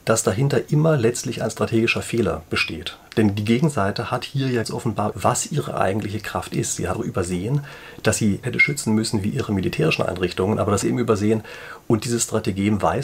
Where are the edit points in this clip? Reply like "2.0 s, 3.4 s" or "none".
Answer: 4.6 s, 5.1 s, 6.9 s, 8.4 s, 10.8 s

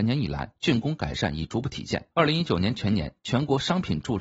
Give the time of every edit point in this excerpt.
2.1 s

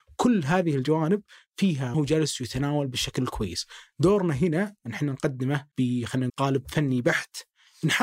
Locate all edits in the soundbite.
1.9 s, 6.3 s

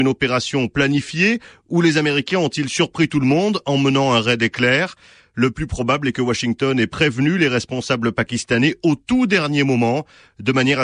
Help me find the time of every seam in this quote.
none

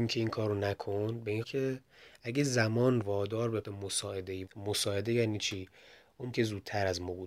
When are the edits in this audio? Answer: 1.4 s, 3.0 s, 3.6 s, 4.5 s, 6.3 s

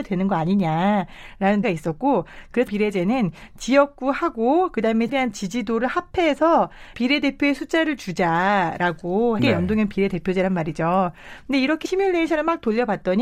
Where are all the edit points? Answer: 1.6 s, 2.7 s, 5.1 s, 6.9 s, 9.4 s, 11.8 s

